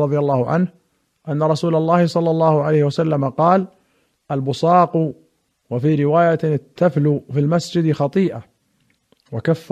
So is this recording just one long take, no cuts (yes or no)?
yes